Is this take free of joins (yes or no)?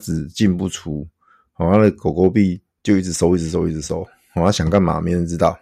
yes